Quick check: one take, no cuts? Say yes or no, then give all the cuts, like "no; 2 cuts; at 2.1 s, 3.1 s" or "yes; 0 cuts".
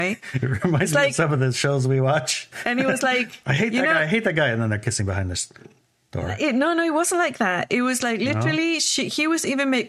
yes; 0 cuts